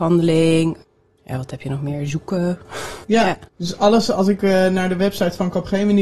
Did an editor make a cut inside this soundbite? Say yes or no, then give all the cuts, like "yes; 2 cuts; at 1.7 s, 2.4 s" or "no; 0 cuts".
yes; 2 cuts; at 3.0 s, 3.5 s